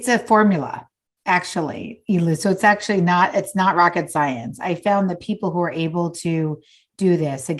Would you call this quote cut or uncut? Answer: uncut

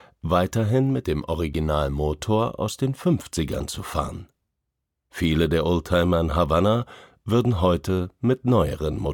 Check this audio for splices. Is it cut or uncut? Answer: uncut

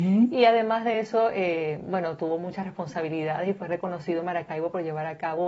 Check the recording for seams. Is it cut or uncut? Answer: uncut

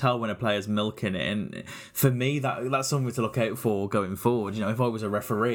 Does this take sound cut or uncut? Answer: uncut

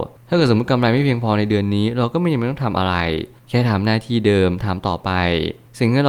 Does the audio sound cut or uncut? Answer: uncut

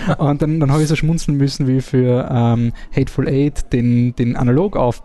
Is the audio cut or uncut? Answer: uncut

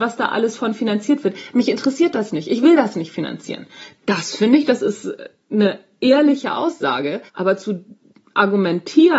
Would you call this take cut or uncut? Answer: cut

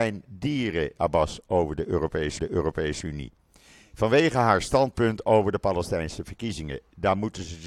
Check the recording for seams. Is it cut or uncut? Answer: cut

